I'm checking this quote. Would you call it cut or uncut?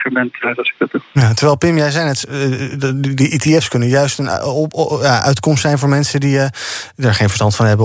cut